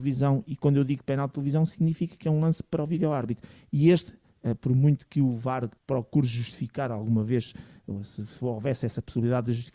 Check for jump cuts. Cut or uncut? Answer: cut